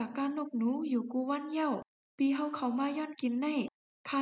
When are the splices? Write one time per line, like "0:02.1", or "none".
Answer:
none